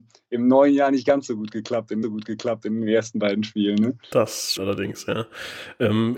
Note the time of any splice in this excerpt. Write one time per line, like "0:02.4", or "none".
0:02.0
0:04.6